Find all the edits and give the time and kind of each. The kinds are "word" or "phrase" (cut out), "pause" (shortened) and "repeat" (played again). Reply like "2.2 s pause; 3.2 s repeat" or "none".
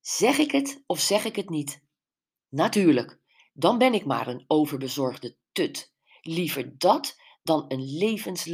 none